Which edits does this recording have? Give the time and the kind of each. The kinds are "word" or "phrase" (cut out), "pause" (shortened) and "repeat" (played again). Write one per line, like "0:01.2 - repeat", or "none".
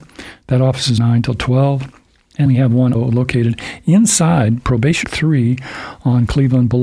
0:01.0 - word
0:02.5 - word
0:02.9 - word
0:05.0 - phrase